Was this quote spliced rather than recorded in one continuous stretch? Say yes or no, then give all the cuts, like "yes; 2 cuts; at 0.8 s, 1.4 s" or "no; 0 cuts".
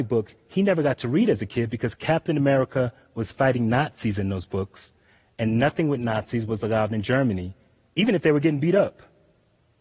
no; 0 cuts